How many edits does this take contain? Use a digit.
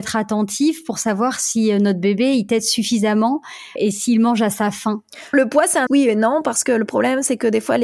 3